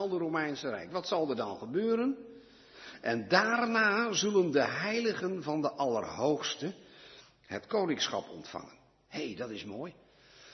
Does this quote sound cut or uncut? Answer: uncut